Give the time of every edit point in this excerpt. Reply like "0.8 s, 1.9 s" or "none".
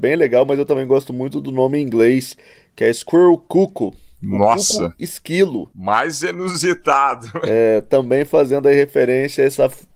none